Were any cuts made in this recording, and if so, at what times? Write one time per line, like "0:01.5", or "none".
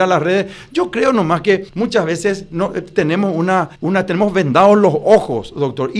0:01.7
0:03.7